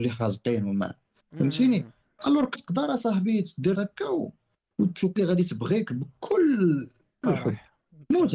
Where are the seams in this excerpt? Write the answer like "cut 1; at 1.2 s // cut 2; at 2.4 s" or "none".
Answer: cut 1; at 2.5 s // cut 2; at 3.7 s // cut 3; at 5.2 s // cut 4; at 7.2 s

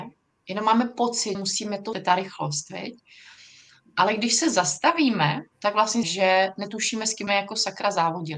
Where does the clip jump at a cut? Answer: cut 1; at 1.3 s // cut 2; at 1.9 s // cut 3; at 5.5 s // cut 4; at 6.0 s // cut 5; at 7.3 s

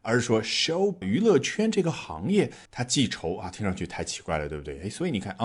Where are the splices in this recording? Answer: cut 1; at 1.0 s // cut 2; at 2.7 s

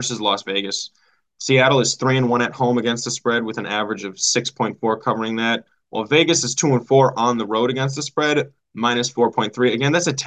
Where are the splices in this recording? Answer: none

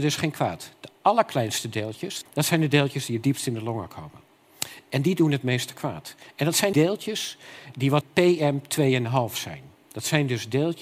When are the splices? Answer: cut 1; at 6.7 s // cut 2; at 8.0 s

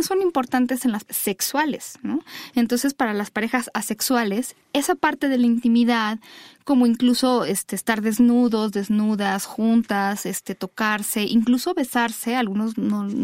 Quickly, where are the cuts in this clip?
cut 1; at 1.1 s

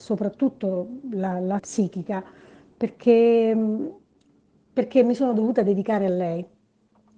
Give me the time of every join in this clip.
cut 1; at 1.6 s

